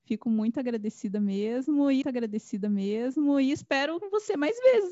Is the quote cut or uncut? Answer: cut